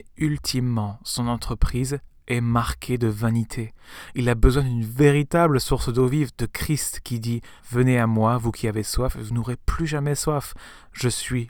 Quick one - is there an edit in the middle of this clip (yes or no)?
yes